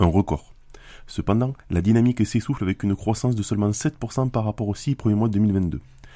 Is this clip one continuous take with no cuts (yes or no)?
no